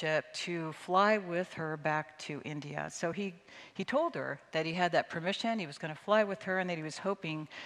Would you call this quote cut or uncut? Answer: uncut